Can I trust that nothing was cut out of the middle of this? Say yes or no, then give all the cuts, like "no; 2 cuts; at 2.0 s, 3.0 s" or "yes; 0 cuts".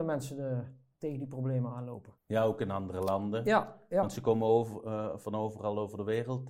no; 1 cut; at 2.2 s